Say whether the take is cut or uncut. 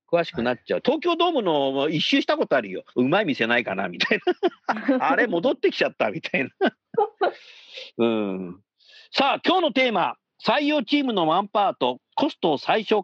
uncut